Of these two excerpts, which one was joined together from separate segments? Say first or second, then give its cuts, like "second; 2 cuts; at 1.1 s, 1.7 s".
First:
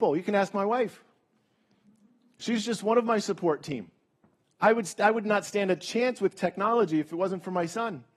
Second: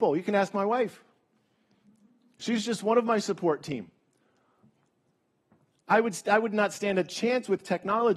first; 1 cut; at 4.1 s